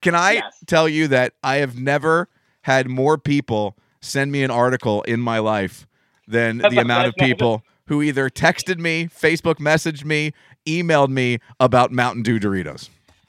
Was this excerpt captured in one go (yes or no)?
yes